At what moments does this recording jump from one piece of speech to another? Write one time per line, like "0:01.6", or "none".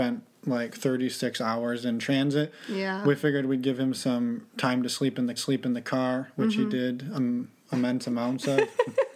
0:05.4

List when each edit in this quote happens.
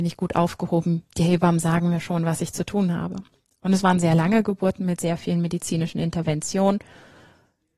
none

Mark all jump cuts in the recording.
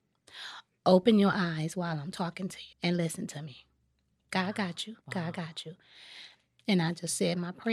0:02.7
0:05.0

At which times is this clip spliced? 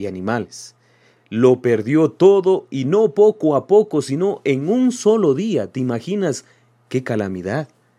none

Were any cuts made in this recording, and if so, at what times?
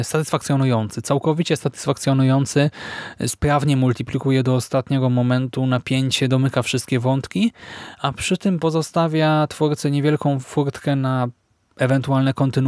none

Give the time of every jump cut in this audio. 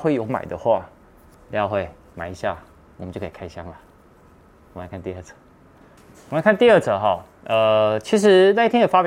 none

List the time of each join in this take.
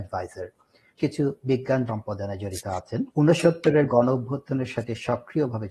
0:01.0
0:01.9
0:03.1

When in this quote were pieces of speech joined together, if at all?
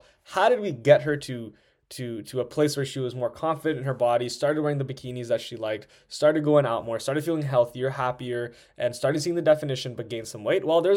none

